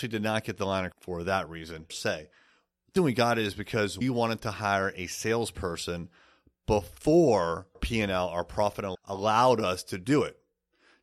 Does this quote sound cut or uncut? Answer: cut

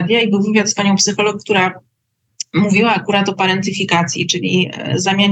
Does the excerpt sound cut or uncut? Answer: uncut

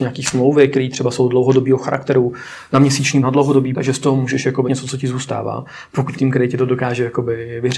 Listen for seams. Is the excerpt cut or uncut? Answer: cut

